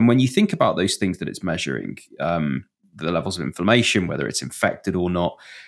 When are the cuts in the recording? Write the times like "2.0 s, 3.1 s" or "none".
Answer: none